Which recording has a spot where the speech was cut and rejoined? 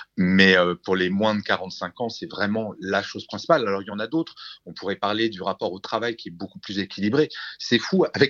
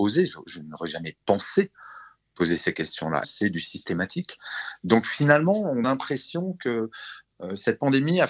second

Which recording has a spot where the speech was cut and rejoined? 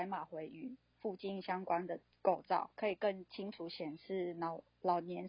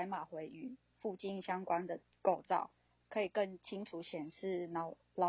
first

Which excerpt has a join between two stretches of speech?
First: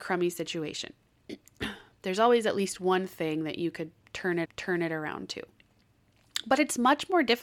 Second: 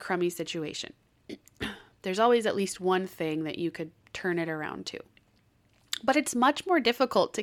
first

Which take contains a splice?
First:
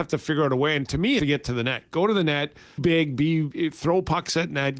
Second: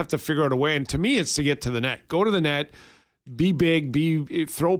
first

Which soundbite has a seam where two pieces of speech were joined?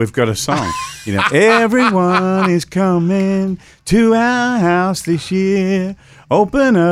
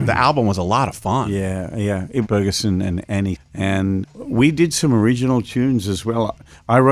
second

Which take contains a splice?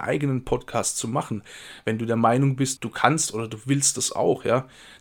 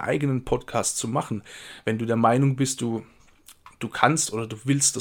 first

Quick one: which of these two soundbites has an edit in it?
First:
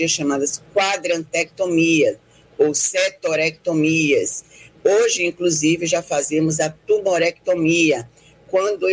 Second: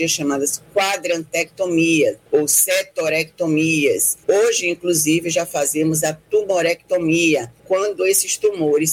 second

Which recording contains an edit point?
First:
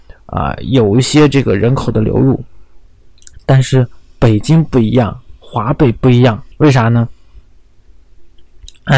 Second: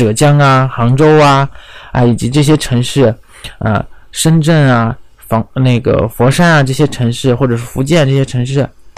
first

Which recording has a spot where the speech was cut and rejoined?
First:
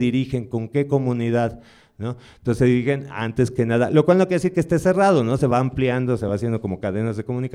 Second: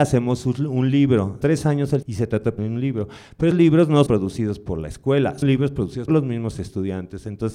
second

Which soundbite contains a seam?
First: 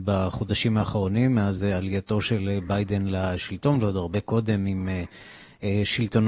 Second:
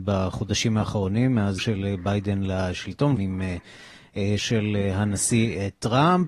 second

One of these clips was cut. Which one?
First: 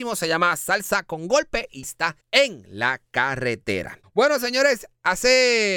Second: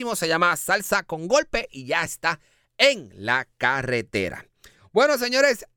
first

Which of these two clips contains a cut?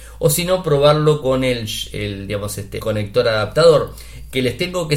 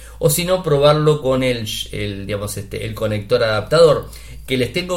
first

